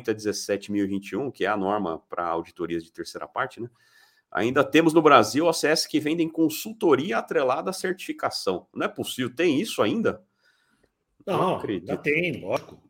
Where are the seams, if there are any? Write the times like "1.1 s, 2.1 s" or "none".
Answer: none